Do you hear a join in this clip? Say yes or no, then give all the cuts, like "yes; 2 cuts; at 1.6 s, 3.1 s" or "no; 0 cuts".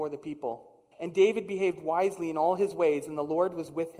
yes; 1 cut; at 0.9 s